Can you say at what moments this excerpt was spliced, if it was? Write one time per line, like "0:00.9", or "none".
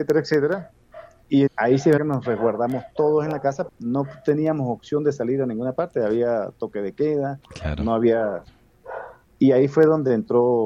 0:01.5
0:02.0
0:03.7